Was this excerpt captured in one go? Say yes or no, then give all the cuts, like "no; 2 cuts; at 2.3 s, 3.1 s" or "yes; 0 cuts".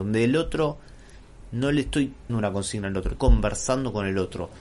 no; 2 cuts; at 2.3 s, 3.1 s